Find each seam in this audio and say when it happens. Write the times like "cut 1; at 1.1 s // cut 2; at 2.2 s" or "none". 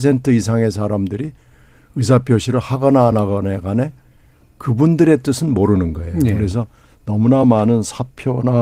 none